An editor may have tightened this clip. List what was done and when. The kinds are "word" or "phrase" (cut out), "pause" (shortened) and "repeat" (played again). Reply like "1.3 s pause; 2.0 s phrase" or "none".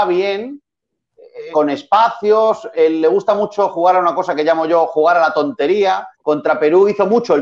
1.5 s word; 2.7 s word; 6.1 s pause